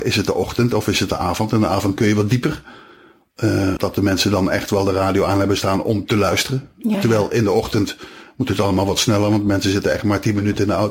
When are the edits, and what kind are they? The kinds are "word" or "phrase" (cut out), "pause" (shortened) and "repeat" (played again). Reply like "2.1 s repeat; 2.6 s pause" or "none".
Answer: 3.8 s word